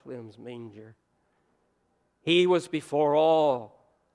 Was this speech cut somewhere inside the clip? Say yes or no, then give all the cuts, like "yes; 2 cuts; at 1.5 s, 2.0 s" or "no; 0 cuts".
no; 0 cuts